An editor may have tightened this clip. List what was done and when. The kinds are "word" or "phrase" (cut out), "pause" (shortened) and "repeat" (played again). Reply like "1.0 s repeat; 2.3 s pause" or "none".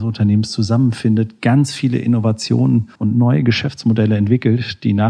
3.0 s pause